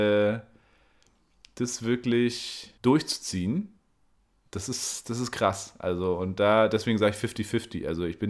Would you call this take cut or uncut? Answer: cut